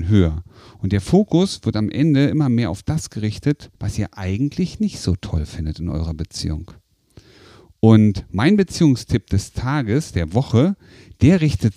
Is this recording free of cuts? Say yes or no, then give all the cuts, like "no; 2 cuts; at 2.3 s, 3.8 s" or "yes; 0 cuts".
no; 1 cut; at 3.7 s